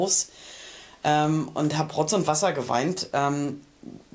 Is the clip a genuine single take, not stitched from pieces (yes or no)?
yes